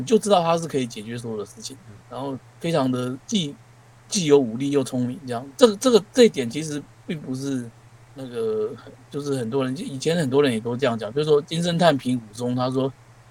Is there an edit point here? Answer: yes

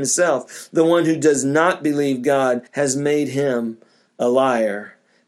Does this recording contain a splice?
yes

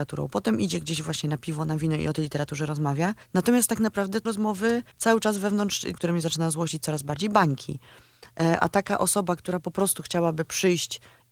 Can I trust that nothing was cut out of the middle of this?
no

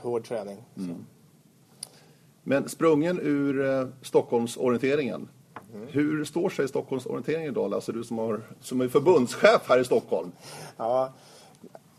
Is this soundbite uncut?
yes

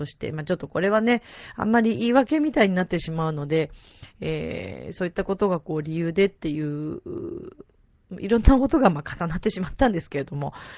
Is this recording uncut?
yes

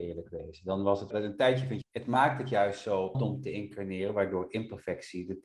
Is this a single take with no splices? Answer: no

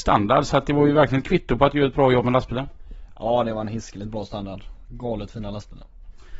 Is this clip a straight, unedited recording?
yes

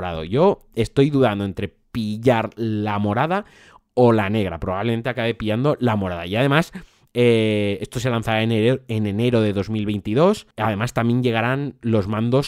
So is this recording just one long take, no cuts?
yes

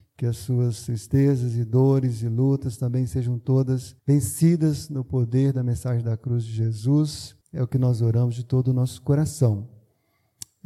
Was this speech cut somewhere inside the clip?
yes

